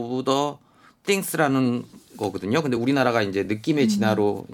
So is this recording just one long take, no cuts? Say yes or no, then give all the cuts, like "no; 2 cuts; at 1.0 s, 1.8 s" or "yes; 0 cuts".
yes; 0 cuts